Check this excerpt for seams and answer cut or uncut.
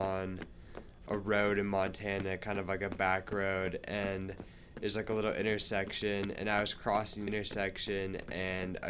cut